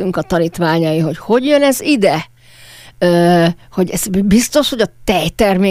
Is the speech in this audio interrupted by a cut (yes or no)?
no